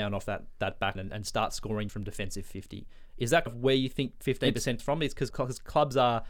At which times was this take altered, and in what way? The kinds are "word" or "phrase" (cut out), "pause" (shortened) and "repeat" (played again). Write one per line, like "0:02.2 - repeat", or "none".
0:01.0 - word
0:01.9 - word
0:03.5 - word
0:04.2 - word
0:04.8 - word
0:05.3 - word